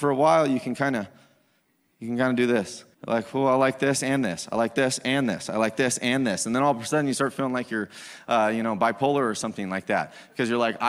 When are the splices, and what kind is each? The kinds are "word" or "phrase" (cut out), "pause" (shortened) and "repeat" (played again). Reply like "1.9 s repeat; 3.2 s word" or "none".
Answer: 2.9 s pause